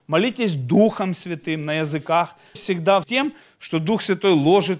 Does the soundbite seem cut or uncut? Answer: cut